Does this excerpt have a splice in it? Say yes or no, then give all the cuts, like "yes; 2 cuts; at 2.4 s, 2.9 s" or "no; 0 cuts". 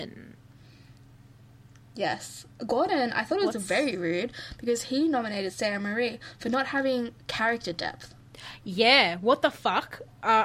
no; 0 cuts